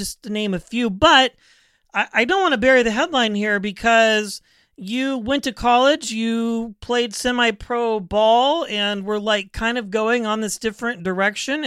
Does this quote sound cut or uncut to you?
uncut